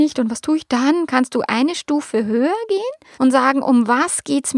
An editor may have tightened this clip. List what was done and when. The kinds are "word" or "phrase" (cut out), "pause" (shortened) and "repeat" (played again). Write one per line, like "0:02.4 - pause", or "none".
0:03.1 - pause